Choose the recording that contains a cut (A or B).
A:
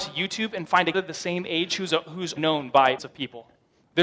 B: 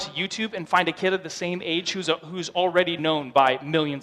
A